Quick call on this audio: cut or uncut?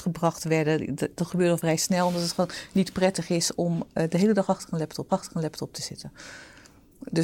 cut